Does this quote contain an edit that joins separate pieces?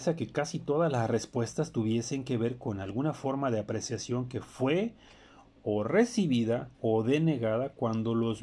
yes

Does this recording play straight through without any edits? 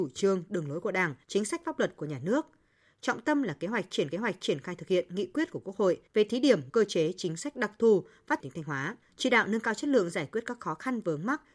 no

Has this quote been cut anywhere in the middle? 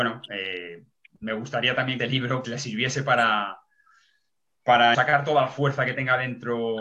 yes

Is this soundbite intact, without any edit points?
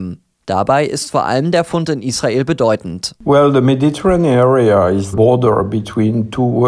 no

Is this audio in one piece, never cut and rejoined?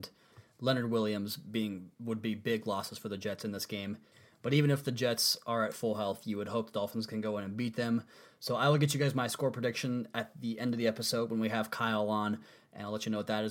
yes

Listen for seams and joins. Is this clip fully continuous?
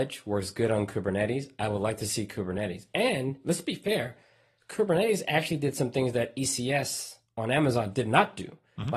yes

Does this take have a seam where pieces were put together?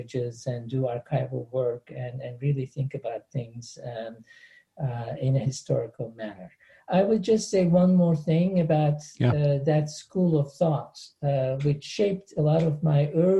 no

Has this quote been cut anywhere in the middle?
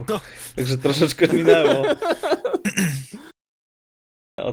yes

